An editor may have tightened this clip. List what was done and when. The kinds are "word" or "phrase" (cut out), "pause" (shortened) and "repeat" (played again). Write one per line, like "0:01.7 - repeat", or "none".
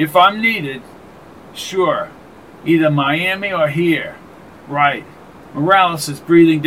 none